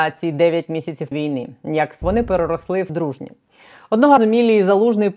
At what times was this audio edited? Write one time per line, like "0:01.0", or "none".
0:01.1
0:02.0
0:02.9
0:04.2